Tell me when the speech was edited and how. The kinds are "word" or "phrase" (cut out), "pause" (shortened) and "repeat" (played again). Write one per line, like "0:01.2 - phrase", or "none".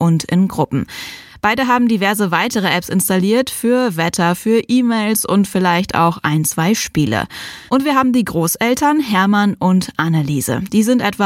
0:07.7 - pause